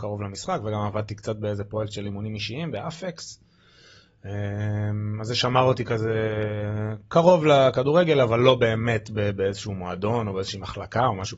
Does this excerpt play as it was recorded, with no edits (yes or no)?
yes